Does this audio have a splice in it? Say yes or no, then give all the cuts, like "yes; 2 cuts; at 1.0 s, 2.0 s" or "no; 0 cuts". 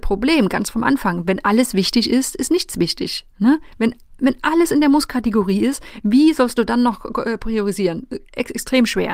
yes; 1 cut; at 3.3 s